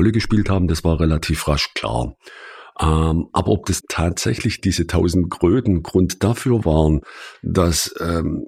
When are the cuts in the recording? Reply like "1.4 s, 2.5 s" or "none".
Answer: 3.8 s